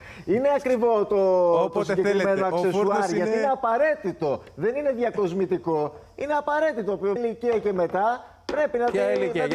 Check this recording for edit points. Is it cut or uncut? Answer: cut